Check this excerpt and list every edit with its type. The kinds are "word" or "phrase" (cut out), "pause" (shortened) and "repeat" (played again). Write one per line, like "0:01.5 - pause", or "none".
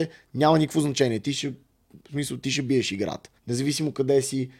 0:02.0 - pause
0:03.4 - pause